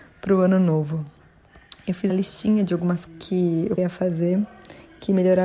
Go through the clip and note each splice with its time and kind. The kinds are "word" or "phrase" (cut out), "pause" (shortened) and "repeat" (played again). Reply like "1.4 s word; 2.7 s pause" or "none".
2.1 s word; 3.1 s word; 3.8 s word